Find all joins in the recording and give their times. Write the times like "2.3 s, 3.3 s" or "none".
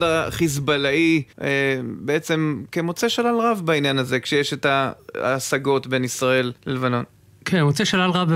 1.3 s, 6.6 s